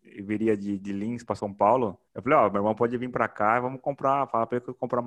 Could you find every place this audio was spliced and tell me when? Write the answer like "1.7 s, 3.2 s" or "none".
2.1 s